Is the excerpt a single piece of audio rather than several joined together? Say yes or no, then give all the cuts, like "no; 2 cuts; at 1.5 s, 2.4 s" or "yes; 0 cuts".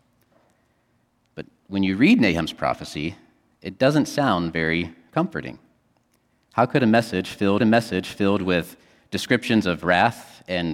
no; 1 cut; at 7.6 s